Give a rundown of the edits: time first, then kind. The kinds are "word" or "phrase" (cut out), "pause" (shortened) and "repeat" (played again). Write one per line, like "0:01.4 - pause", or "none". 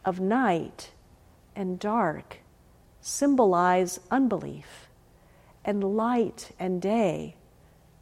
none

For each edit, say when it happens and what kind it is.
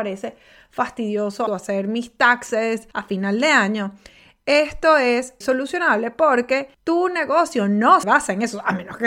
0:01.5 - phrase
0:02.9 - pause
0:05.4 - word
0:06.7 - pause
0:08.0 - word

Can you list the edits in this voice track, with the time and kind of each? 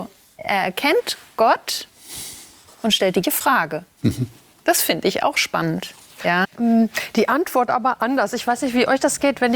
0:03.2 - word
0:06.4 - phrase

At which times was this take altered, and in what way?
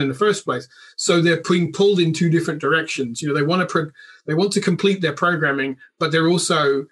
none

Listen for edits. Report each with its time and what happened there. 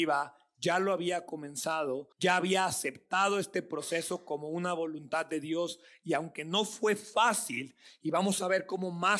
0:02.1 - pause

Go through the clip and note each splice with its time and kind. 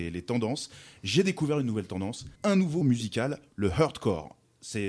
0:02.3 - pause
0:02.8 - word

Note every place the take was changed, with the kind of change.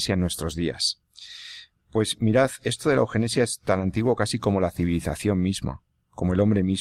none

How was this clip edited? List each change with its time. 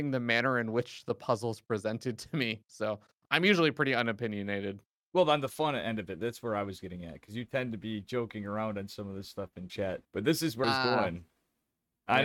0:05.0 - pause
0:09.7 - word
0:10.0 - pause
0:10.6 - word

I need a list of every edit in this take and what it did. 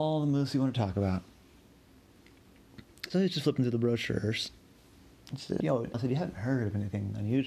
0:05.6 - word
0:05.9 - word

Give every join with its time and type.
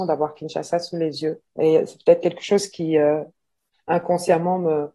0:01.5 - pause

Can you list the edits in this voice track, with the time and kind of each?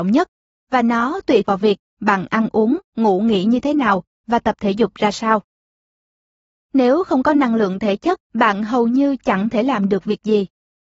0:01.4 - word
0:08.2 - pause

